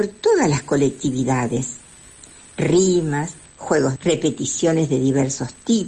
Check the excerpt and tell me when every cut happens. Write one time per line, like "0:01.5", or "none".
0:04.0